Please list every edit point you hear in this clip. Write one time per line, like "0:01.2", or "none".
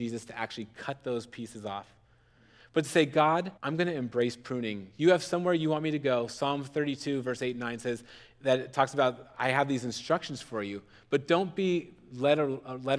0:03.6